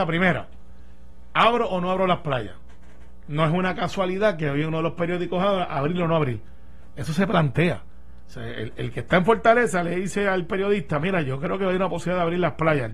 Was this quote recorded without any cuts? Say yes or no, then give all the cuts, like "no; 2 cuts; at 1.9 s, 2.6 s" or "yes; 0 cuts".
yes; 0 cuts